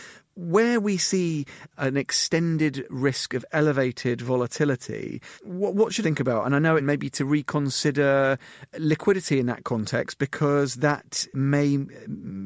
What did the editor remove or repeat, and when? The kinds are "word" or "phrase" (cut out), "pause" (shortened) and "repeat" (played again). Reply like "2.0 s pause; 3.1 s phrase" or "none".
5.4 s pause; 6.0 s word; 6.8 s phrase